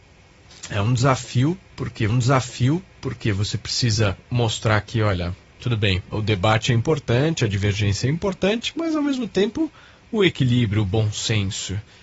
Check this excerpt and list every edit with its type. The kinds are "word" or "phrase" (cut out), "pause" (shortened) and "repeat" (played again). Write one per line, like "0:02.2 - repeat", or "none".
0:02.1 - repeat
0:04.2 - pause
0:05.6 - word
0:06.1 - word